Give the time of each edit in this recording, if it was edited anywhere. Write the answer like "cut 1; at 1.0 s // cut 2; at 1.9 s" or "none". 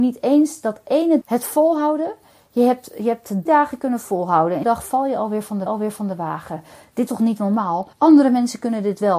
cut 1; at 1.2 s // cut 2; at 3.5 s // cut 3; at 4.6 s // cut 4; at 5.7 s // cut 5; at 7.1 s // cut 6; at 7.9 s